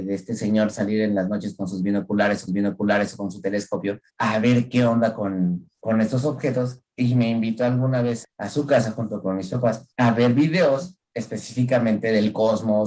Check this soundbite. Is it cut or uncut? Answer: cut